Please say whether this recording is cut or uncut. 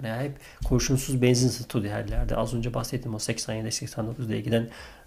uncut